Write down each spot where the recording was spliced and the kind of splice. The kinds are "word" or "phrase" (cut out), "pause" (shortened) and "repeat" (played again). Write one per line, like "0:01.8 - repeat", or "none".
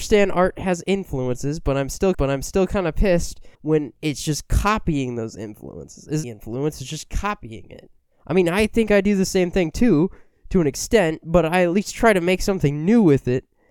0:02.1 - repeat
0:03.5 - pause
0:06.2 - phrase
0:08.0 - pause

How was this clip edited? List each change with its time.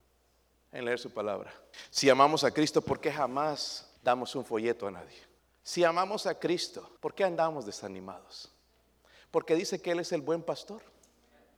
0:01.7 - pause
0:04.0 - pause
0:05.4 - pause
0:07.0 - pause

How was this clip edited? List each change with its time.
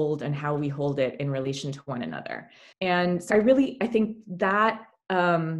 0:02.7 - pause
0:03.3 - word

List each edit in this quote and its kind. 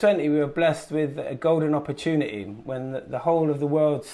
none

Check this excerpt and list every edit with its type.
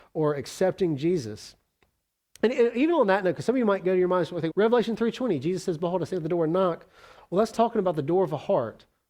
0:04.5 - word
0:07.5 - word

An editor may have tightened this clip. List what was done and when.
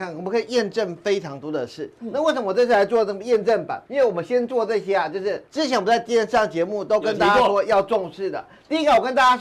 0:03.9 - pause
0:05.5 - pause

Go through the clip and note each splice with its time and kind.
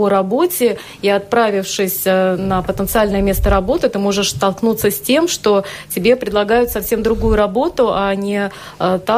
none

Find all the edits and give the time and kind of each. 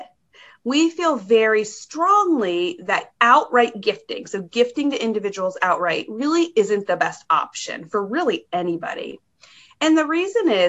none

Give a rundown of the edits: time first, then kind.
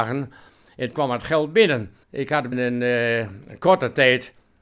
0:00.9 - word
0:02.0 - pause
0:02.5 - word

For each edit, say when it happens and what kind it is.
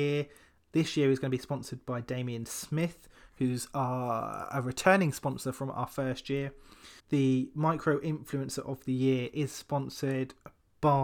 0:07.0 - pause

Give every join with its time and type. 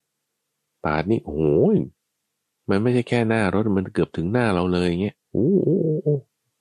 0:05.2 - pause

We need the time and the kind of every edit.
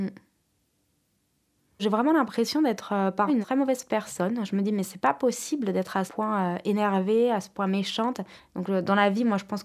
0:03.3 - word
0:06.1 - word

